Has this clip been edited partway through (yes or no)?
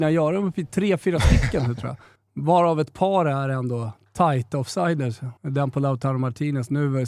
yes